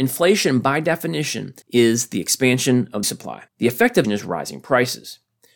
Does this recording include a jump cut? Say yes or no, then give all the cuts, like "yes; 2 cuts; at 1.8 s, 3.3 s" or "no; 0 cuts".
yes; 4 cuts; at 1.6 s, 3.0 s, 3.5 s, 4.0 s